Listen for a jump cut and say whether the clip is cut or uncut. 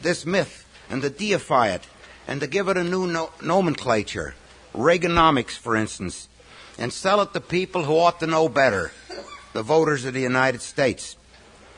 uncut